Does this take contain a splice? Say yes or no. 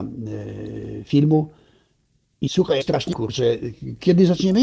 yes